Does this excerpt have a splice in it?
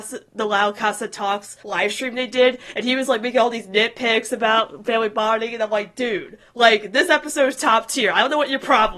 yes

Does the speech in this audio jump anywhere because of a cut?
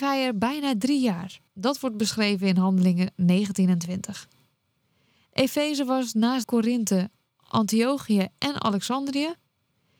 yes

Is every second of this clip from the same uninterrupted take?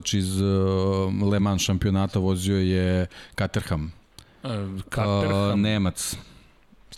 yes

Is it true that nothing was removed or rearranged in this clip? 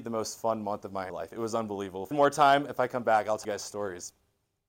no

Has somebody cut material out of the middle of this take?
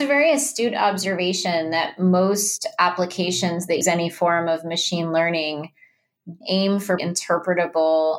yes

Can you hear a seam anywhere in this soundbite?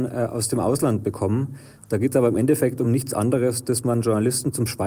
no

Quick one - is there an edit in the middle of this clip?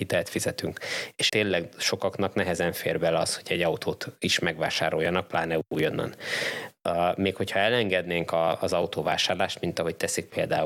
yes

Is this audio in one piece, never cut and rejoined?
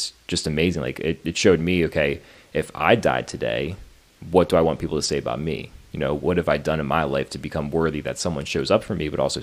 yes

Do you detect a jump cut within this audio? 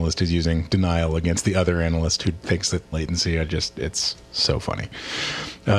yes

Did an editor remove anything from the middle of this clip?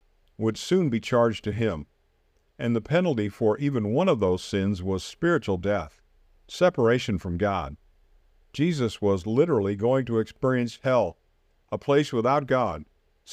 no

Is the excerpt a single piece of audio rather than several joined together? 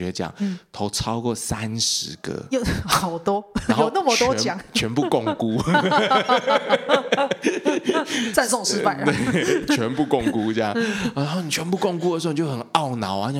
yes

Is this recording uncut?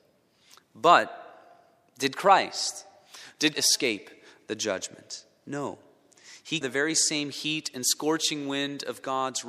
no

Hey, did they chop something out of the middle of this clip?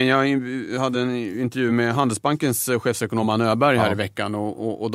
no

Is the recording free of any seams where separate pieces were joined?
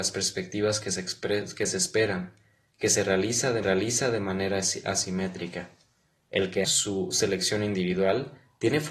no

